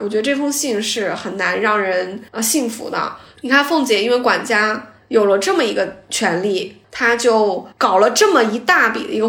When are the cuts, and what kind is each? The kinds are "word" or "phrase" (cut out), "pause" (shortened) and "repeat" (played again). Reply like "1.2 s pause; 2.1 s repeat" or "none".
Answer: 2.3 s pause; 7.7 s pause